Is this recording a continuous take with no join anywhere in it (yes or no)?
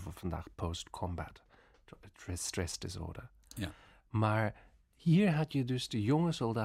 yes